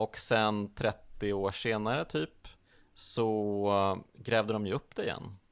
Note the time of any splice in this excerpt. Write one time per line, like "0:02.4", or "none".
none

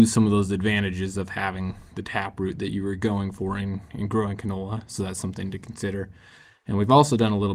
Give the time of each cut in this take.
none

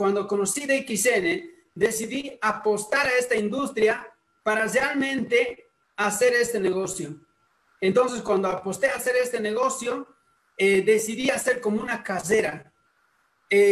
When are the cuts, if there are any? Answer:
none

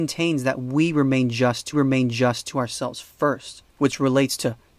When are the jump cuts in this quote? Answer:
0:01.7
0:03.7

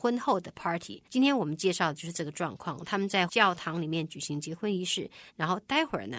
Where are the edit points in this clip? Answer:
0:01.0

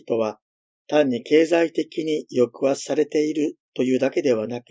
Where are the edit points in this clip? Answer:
none

